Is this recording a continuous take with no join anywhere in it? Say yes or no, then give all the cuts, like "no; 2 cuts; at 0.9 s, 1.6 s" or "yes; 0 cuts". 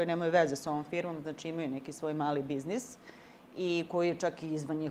yes; 0 cuts